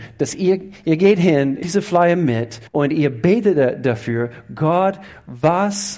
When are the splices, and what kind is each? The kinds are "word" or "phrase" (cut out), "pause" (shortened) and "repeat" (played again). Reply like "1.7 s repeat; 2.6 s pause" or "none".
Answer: 1.6 s word; 2.7 s pause